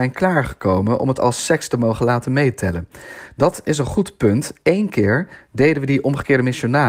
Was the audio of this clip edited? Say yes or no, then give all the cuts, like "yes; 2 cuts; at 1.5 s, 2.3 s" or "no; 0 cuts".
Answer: no; 0 cuts